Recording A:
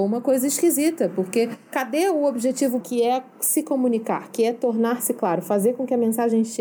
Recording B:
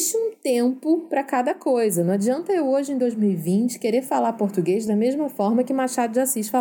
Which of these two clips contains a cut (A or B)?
A